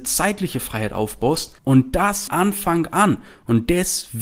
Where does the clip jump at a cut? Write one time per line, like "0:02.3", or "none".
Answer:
0:01.6
0:02.3